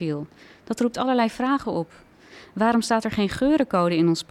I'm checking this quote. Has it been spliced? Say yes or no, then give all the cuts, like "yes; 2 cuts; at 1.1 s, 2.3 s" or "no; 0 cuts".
no; 0 cuts